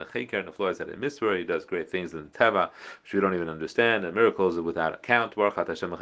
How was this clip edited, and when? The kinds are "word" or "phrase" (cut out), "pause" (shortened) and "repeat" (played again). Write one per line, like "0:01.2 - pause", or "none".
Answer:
none